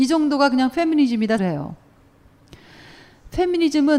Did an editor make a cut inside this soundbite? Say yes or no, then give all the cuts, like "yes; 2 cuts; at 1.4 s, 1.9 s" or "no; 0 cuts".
yes; 1 cut; at 1.4 s